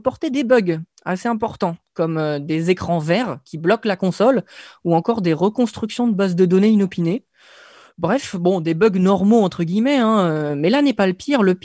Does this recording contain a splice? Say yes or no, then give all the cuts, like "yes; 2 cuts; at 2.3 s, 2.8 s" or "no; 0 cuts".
no; 0 cuts